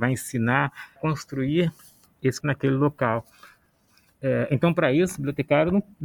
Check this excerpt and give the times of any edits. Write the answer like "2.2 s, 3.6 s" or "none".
1.0 s, 2.4 s